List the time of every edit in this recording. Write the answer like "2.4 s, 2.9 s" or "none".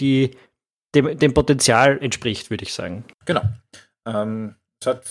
3.1 s